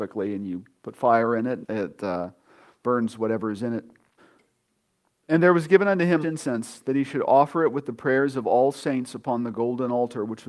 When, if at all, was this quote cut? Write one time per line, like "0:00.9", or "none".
0:01.6
0:04.2
0:06.2